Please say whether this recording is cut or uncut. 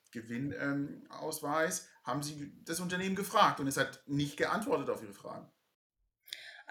uncut